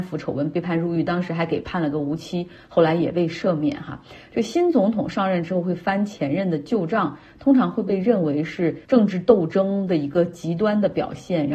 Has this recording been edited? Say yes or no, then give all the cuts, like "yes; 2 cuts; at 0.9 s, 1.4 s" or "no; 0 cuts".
yes; 1 cut; at 8.8 s